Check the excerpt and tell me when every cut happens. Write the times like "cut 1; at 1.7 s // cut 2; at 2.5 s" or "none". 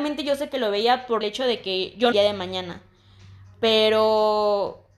cut 1; at 1.2 s // cut 2; at 2.1 s